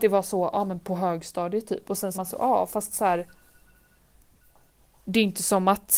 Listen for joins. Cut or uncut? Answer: cut